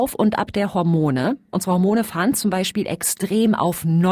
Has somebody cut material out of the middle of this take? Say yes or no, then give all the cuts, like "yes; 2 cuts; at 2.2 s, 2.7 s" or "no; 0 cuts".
no; 0 cuts